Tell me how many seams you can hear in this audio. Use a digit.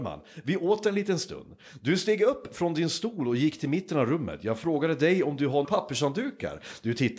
1